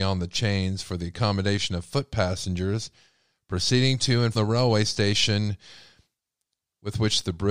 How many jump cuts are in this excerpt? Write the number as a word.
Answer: one